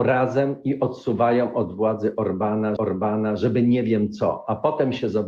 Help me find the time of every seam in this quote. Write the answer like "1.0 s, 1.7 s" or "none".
2.8 s